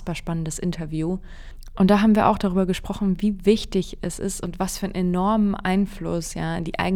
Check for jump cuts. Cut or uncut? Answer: uncut